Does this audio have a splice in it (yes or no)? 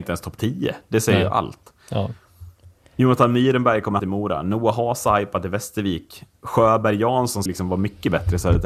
yes